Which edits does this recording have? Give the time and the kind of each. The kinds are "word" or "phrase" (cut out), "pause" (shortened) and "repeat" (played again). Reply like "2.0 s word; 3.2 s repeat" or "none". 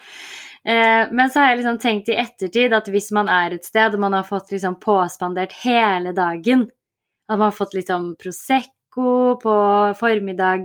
none